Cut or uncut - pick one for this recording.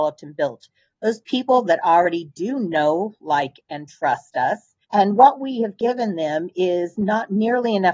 cut